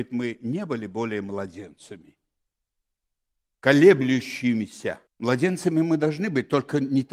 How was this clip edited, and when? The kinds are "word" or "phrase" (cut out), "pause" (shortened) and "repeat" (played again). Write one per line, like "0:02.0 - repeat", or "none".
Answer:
0:05.1 - pause